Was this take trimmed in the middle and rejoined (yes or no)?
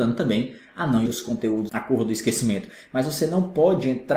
yes